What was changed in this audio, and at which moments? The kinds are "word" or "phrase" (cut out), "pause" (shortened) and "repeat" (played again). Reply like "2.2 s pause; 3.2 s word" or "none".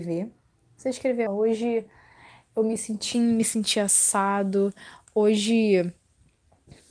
1.3 s word; 3.1 s word